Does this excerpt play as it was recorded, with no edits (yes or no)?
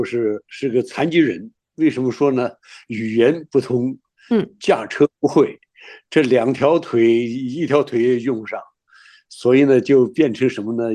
yes